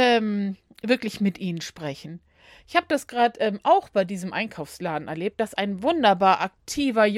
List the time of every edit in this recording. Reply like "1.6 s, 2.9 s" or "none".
none